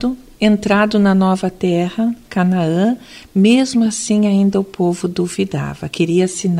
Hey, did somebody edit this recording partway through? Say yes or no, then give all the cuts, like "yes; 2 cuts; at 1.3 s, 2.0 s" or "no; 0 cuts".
no; 0 cuts